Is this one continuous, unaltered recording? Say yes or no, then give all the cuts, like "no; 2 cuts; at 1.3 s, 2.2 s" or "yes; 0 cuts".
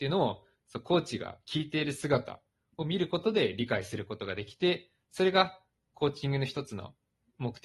yes; 0 cuts